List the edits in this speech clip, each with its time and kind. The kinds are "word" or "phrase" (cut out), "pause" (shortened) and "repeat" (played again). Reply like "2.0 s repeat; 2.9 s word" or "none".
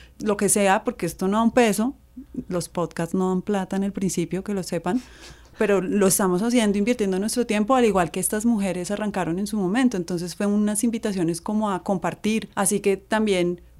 12.5 s pause